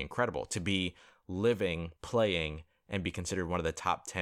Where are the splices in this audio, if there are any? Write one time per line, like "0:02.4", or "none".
0:02.0